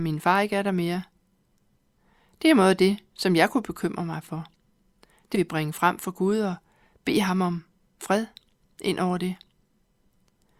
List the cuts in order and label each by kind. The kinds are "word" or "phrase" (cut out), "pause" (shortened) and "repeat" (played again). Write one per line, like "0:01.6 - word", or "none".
0:05.3 - word